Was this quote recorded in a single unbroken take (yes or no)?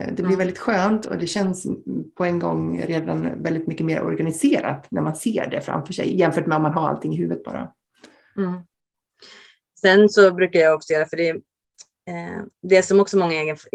yes